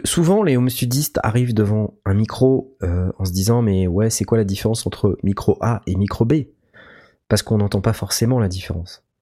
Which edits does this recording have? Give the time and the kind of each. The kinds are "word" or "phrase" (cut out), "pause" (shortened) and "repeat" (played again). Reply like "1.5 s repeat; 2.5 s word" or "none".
none